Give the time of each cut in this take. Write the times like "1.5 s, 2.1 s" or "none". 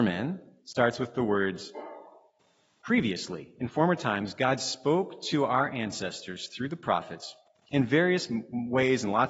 none